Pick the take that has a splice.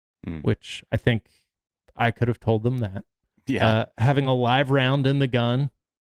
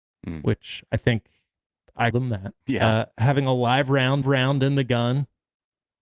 second; 3 cuts; at 2.1 s, 2.6 s, 4.2 s

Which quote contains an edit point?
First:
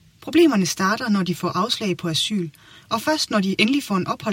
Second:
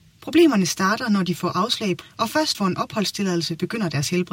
second; 2 cuts; at 2.0 s, 2.5 s

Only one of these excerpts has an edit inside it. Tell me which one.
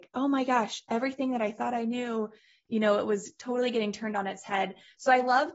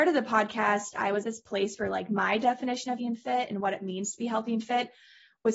second; 2 cuts; at 1.2 s, 3.0 s

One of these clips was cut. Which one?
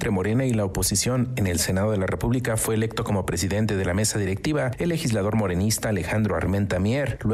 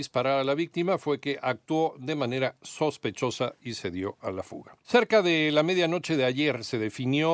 second; 1 cut; at 4.8 s

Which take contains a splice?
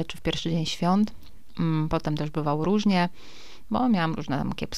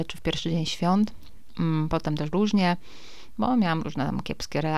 second; 1 cut; at 2.3 s

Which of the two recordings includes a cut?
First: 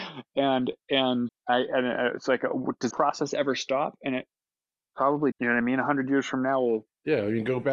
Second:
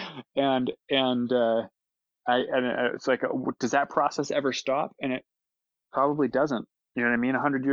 first; 3 cuts; at 1.3 s, 2.9 s, 5.3 s

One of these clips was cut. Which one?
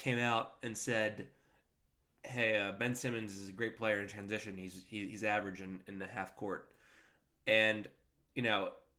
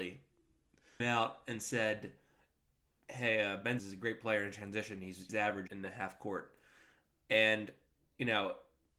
second; 4 cuts; at 1.0 s, 3.8 s, 5.3 s, 5.7 s

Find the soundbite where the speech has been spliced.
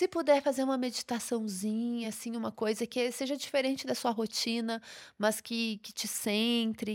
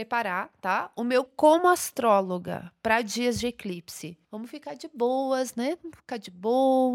second; 2 cuts; at 1.3 s, 4.2 s

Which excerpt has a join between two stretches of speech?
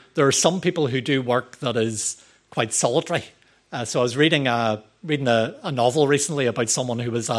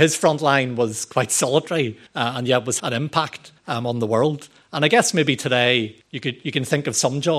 second; 4 cuts; at 2.1 s, 2.8 s, 3.6 s, 6.0 s

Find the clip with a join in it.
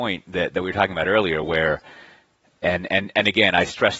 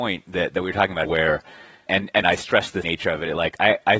second; 4 cuts; at 1.0 s, 1.9 s, 2.2 s, 2.8 s

